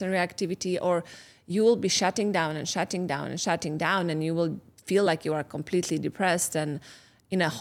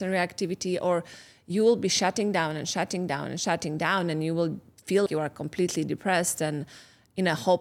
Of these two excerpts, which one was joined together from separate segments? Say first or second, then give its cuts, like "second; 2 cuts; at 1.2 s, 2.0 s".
second; 1 cut; at 5.1 s